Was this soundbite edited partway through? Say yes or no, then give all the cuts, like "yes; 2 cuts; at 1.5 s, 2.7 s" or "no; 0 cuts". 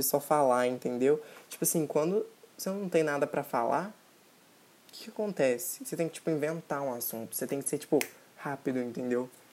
no; 0 cuts